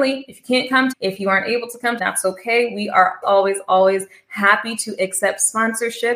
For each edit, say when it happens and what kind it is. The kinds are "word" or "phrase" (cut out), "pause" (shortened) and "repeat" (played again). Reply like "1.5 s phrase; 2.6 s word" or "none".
0.9 s phrase; 2.0 s phrase; 3.2 s word

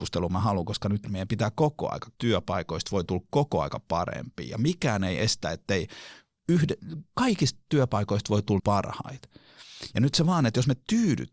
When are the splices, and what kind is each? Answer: 1.0 s word; 2.1 s word; 8.6 s word

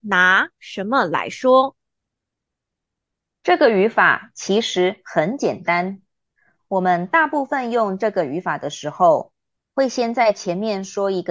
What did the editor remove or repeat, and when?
none

